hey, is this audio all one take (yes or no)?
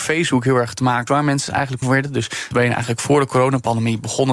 no